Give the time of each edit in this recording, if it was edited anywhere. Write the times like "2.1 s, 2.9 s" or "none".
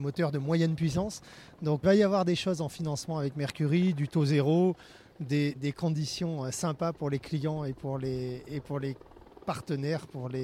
1.8 s, 5.5 s